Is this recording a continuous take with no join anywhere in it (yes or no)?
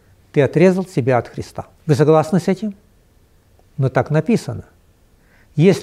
no